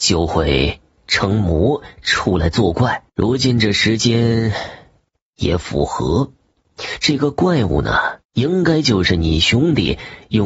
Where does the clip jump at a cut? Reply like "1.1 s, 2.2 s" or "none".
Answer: 3.1 s, 8.2 s